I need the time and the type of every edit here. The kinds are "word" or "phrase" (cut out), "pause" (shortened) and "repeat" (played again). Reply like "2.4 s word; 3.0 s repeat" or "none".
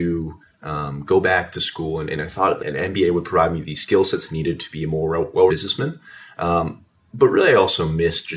2.6 s word; 5.5 s word